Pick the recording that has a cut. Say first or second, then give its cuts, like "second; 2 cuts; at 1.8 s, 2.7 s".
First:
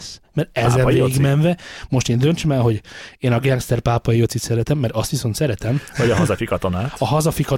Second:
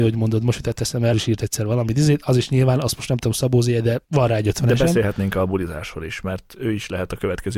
second; 2 cuts; at 1.1 s, 4.0 s